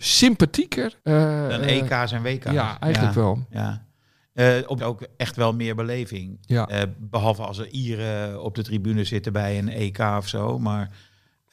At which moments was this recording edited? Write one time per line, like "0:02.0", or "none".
0:01.0
0:04.8

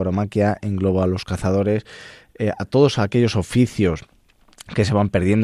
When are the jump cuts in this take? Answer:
none

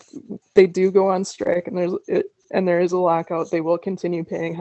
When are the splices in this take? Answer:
none

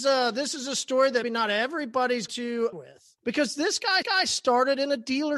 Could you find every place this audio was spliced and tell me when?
0:01.2
0:02.3
0:02.7
0:03.2
0:04.0

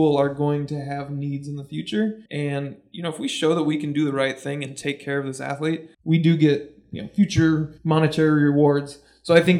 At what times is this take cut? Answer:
0:02.3
0:05.9
0:07.8

